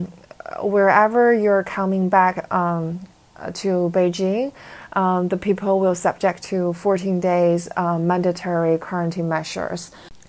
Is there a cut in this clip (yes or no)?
no